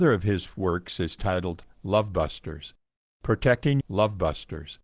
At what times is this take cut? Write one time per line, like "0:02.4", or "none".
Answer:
0:03.8